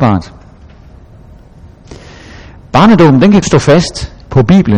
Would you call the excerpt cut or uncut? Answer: cut